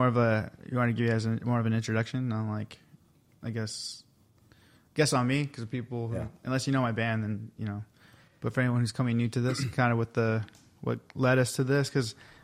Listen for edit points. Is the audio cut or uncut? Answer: uncut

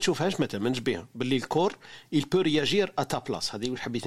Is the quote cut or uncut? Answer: uncut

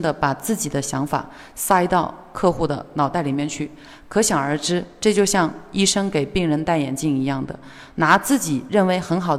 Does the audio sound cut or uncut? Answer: uncut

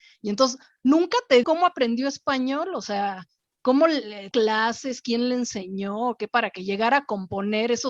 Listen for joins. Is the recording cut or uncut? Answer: cut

